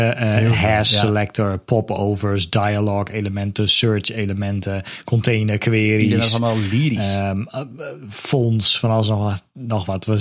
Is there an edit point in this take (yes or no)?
no